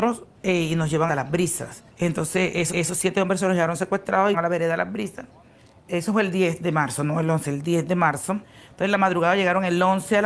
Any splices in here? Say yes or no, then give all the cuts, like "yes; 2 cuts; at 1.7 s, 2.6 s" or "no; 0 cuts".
yes; 4 cuts; at 1.1 s, 1.9 s, 2.7 s, 4.3 s